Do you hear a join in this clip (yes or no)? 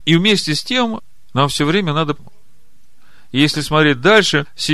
yes